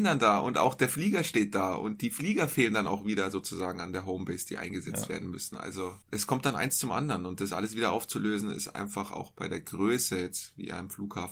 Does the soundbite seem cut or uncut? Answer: cut